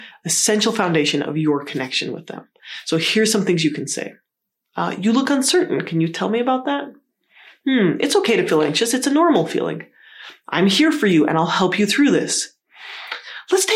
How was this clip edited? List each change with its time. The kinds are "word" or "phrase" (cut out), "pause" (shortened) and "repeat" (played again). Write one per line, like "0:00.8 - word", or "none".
none